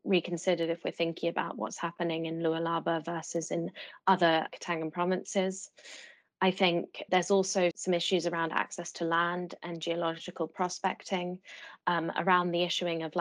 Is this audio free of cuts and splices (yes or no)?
no